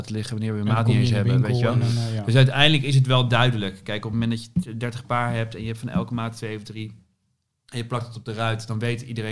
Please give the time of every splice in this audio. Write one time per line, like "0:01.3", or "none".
none